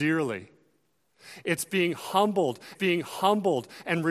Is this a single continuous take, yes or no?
no